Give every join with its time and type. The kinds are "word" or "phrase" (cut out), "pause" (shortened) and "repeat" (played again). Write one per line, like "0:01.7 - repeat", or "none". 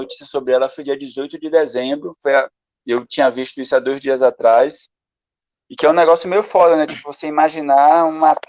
none